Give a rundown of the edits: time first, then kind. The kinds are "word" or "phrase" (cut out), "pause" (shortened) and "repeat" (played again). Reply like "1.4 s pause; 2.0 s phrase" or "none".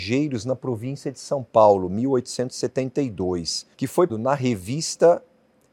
3.7 s pause; 4.1 s word

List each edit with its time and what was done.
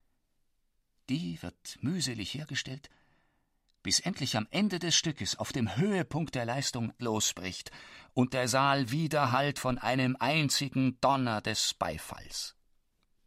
7.0 s word

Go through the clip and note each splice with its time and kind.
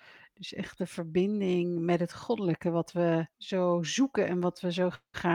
3.3 s pause

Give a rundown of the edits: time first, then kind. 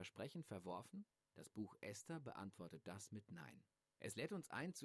none

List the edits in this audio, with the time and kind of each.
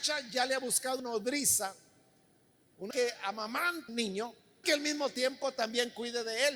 1.0 s word; 2.9 s word; 3.9 s word; 4.6 s word

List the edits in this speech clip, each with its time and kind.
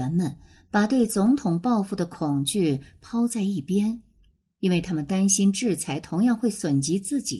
none

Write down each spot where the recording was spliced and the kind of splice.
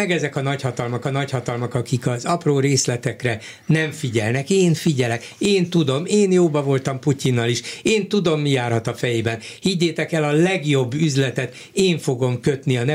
1.0 s repeat

